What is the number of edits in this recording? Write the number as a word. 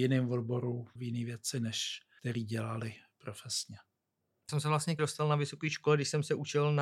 four